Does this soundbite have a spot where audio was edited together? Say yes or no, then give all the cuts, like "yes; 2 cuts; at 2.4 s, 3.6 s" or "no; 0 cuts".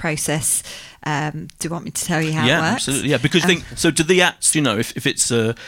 yes; 2 cuts; at 3.4 s, 4.5 s